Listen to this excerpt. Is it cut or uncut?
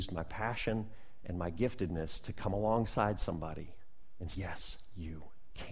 cut